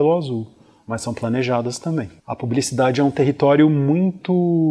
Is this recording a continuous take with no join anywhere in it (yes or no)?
no